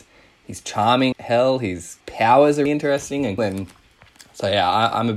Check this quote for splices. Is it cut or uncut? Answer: cut